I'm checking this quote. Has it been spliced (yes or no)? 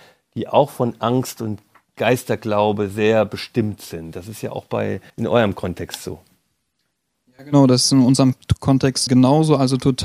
yes